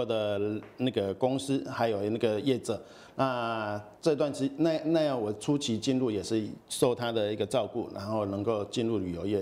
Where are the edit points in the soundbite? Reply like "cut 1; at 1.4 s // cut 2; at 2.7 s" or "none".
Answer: cut 1; at 4.0 s